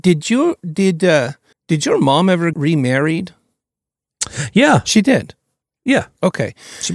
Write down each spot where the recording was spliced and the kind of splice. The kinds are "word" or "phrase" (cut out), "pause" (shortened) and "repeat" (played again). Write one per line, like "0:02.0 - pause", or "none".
0:01.5 - pause
0:02.5 - word